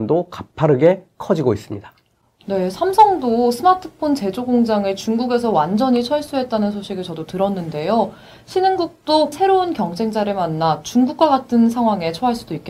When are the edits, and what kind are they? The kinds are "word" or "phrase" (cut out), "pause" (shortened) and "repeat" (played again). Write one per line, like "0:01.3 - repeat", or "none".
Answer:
0:09.3 - word